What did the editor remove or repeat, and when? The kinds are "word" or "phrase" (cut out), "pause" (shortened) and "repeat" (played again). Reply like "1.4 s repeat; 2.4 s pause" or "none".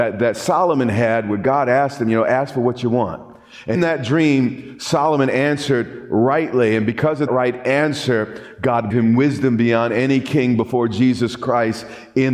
3.7 s word; 7.3 s word; 8.9 s phrase